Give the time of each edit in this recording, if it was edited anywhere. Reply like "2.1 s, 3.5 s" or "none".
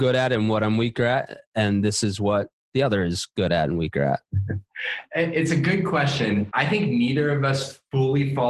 none